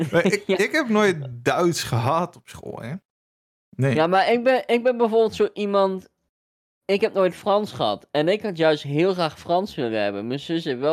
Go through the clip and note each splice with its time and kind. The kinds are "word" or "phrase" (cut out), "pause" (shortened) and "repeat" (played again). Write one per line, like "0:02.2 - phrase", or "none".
none

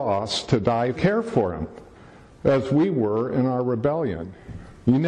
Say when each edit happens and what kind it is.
0:00.9 - phrase

